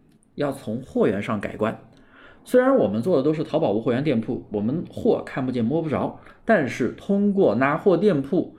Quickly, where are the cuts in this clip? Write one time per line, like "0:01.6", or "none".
none